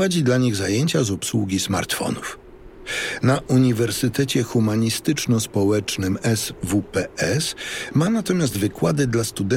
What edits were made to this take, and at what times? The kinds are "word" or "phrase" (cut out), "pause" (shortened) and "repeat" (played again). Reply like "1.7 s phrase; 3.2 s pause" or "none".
none